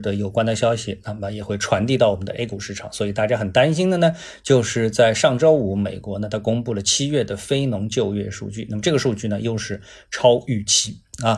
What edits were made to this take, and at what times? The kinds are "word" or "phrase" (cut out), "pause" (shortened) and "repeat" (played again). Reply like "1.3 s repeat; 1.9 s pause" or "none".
none